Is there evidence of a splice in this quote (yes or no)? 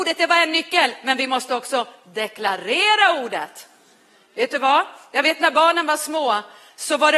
no